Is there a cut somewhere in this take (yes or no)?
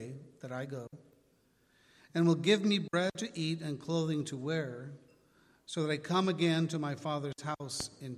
no